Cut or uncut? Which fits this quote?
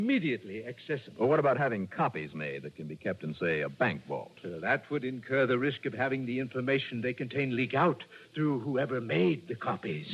cut